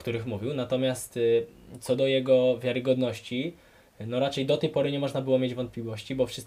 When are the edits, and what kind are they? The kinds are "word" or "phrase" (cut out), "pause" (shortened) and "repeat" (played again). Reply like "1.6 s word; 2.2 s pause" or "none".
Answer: none